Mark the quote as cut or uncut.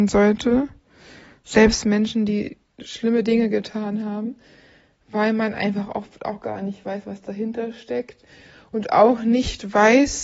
uncut